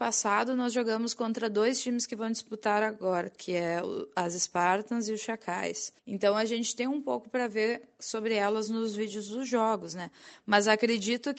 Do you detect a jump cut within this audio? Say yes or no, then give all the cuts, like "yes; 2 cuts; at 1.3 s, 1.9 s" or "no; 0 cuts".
yes; 1 cut; at 6.0 s